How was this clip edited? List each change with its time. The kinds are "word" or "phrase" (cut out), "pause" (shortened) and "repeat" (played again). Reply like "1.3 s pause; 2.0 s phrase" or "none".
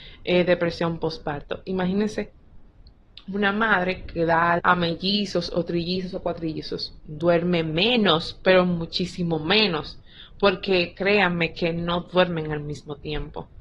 4.6 s word